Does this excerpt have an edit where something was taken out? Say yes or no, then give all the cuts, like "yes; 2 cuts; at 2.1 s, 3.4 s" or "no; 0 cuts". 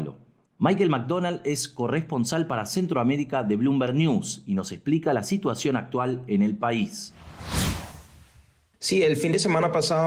no; 0 cuts